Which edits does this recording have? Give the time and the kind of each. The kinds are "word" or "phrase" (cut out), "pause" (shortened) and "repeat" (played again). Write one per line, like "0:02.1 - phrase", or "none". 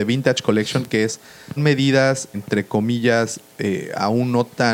0:01.6 - word
0:02.3 - word

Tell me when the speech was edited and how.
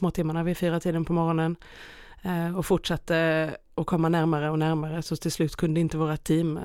none

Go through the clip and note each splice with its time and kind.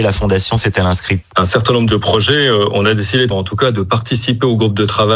0:01.2 - word
0:03.3 - word

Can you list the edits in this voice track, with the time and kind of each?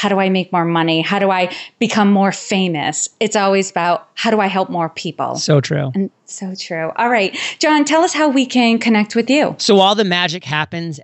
0:06.2 - pause

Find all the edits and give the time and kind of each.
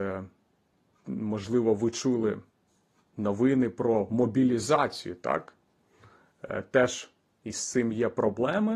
none

